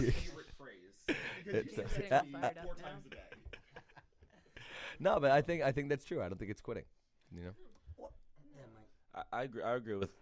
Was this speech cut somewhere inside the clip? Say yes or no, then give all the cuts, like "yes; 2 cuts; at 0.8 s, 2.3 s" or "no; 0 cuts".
no; 0 cuts